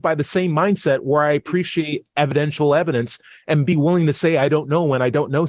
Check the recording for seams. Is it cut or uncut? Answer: uncut